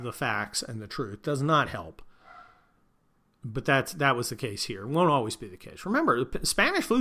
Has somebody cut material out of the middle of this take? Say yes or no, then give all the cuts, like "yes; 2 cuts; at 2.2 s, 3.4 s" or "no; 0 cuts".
no; 0 cuts